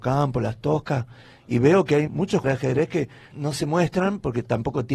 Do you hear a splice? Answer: yes; 3 cuts; at 2.1 s, 2.4 s, 3.3 s

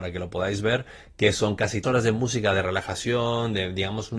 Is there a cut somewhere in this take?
yes; 1 cut; at 1.8 s

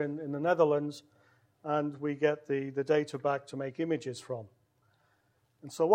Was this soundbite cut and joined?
no; 0 cuts

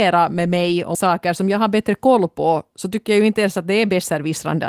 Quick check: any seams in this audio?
yes; 1 cut; at 0.9 s

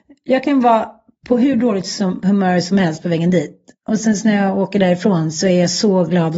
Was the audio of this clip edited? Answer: no; 0 cuts

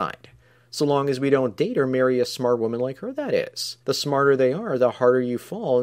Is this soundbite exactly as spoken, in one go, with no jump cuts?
no; 1 cut; at 3.8 s

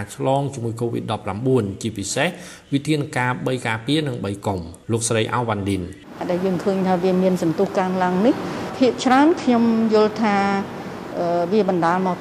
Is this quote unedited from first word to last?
no; 1 cut; at 4.8 s

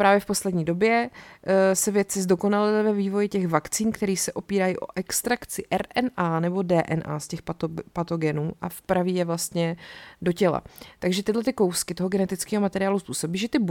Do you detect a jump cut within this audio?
no; 0 cuts

